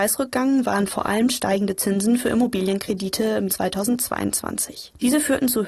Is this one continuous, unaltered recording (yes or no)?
no